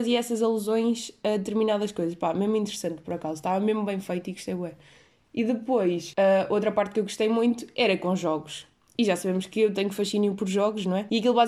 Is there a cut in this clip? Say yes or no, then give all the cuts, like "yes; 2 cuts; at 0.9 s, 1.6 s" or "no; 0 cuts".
no; 0 cuts